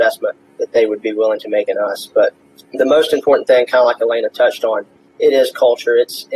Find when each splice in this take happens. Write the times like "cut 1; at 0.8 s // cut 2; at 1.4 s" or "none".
none